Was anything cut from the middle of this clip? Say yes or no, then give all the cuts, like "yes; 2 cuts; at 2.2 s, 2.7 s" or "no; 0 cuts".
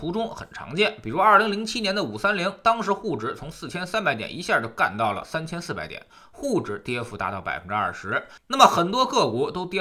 no; 0 cuts